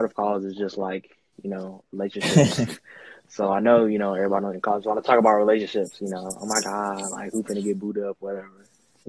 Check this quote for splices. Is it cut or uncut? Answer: uncut